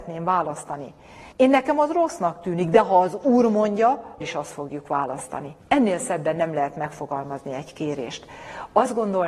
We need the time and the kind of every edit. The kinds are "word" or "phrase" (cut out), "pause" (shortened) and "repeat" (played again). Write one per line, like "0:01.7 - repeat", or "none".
0:01.3 - pause
0:04.2 - word
0:05.6 - pause